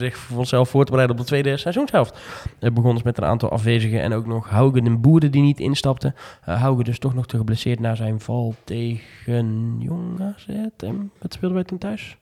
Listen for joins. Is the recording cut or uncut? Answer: uncut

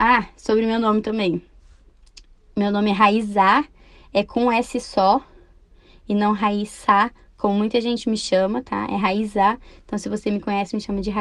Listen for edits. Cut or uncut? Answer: uncut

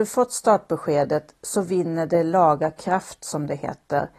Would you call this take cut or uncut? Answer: uncut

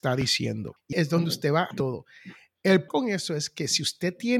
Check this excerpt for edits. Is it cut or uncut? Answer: cut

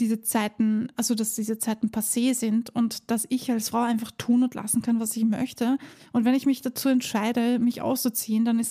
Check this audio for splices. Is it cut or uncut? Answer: uncut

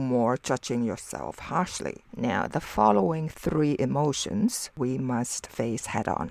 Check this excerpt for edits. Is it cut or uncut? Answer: cut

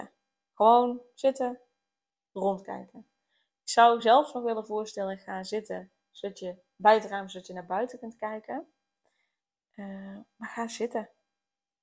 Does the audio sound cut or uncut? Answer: uncut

